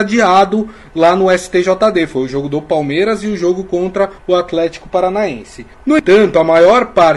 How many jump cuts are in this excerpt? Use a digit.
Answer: 2